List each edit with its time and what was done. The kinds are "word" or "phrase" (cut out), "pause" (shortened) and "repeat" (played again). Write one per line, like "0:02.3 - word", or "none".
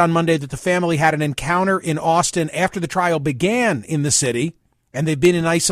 none